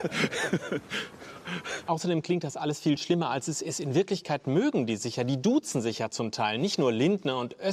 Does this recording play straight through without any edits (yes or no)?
yes